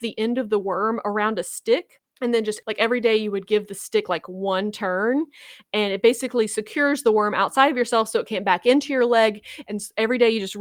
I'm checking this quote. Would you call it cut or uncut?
uncut